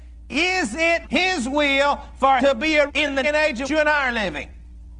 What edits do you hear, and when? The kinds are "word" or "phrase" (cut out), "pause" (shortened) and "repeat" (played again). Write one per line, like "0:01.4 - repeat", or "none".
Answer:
0:01.0 - word
0:02.4 - word
0:02.9 - word
0:03.2 - word
0:03.6 - word